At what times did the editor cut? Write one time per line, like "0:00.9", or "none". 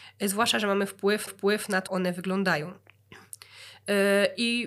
0:01.3
0:01.9